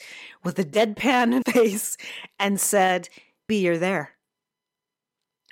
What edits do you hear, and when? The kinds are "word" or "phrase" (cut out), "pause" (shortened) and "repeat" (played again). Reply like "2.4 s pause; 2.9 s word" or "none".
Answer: 1.4 s word; 3.5 s word